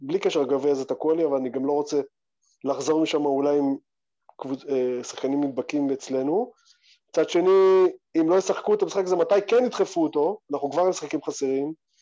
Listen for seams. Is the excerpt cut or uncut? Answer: uncut